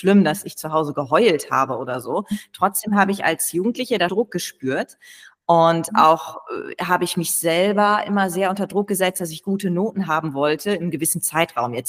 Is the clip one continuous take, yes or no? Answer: no